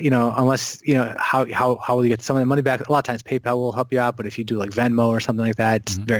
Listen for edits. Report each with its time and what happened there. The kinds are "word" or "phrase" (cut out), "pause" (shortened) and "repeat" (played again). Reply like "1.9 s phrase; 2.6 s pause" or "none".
none